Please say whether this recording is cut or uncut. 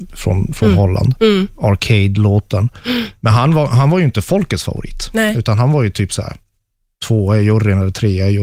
uncut